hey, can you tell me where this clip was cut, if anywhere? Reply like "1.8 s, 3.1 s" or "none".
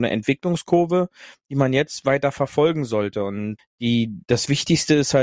3.6 s